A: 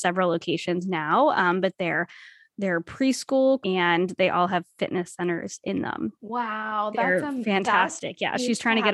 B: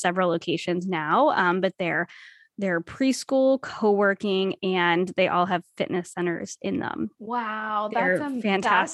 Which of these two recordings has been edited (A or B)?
A